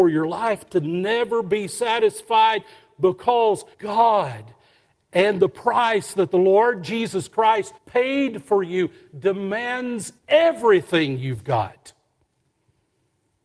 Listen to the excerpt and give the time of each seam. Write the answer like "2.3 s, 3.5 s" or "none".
3.7 s, 7.8 s, 10.2 s